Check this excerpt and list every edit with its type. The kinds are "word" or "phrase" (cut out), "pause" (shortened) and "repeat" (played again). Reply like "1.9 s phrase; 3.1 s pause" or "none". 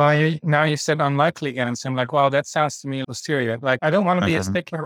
3.0 s word; 3.8 s word

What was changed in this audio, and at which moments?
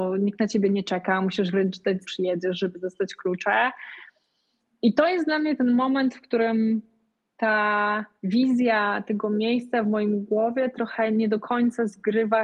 2.0 s phrase; 8.2 s pause

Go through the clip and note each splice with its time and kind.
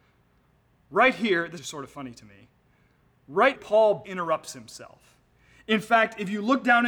1.6 s word; 3.5 s word; 4.0 s word

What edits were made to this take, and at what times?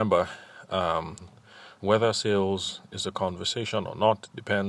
1.8 s word

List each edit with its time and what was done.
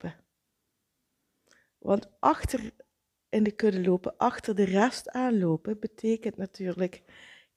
none

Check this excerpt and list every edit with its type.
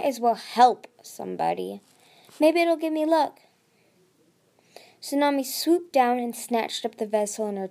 none

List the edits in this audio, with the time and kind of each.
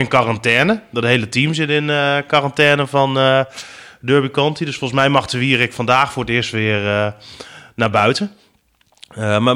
none

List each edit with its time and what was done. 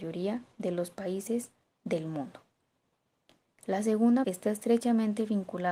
4.2 s word

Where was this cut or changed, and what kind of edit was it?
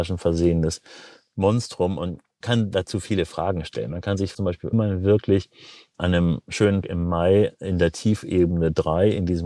2.4 s word; 4.3 s word; 4.7 s word; 6.8 s word

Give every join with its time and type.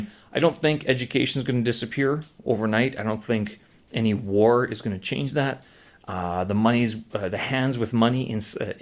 none

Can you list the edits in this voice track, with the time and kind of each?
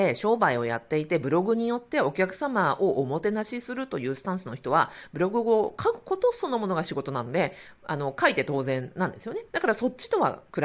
9.5 s pause

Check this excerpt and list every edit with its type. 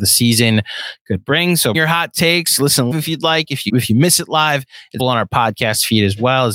1.7 s word; 2.9 s word; 3.7 s word; 5.0 s word

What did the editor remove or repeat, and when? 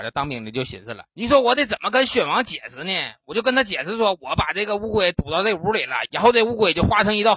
1.1 s pause

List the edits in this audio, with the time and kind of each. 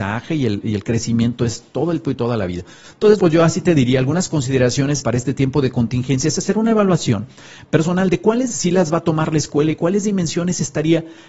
2.0 s word; 3.2 s word; 5.0 s word; 8.5 s word

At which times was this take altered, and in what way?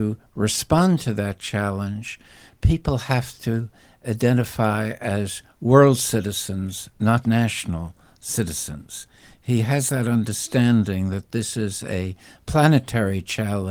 7.2 s word

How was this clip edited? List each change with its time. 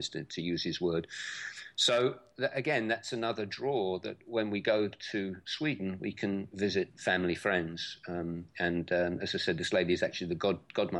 none

